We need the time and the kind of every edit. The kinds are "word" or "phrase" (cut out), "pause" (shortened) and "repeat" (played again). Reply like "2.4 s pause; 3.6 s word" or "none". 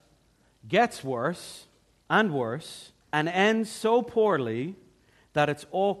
3.0 s pause